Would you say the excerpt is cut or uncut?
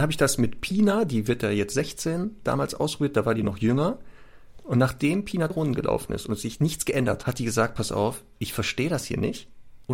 cut